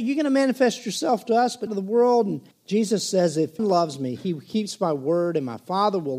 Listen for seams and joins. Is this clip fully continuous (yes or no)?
no